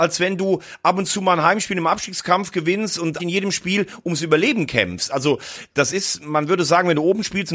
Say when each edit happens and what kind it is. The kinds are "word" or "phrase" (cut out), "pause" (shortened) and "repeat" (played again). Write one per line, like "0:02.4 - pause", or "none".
0:03.2 - word